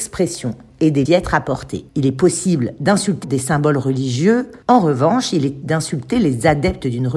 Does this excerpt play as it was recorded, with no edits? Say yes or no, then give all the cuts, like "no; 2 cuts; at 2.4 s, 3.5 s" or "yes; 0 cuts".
no; 5 cuts; at 1.1 s, 1.9 s, 3.2 s, 4.6 s, 5.6 s